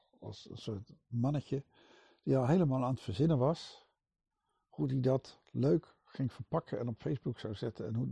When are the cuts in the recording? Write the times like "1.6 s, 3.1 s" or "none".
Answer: none